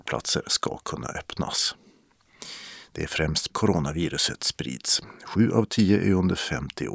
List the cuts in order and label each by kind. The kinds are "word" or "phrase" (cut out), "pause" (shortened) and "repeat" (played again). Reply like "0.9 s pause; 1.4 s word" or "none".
3.5 s phrase